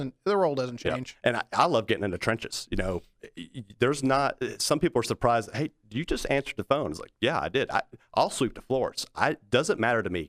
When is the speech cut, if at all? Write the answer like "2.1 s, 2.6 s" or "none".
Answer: none

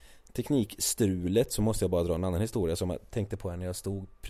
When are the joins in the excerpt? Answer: none

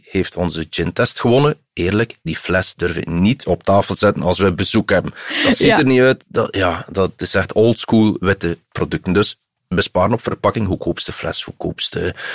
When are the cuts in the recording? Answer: none

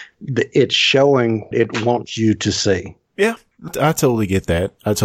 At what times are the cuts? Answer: 1.5 s, 3.0 s, 3.7 s

